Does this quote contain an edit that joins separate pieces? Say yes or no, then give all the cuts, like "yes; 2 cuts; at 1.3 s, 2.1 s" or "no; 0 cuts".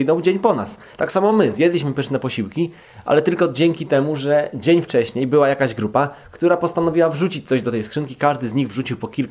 no; 0 cuts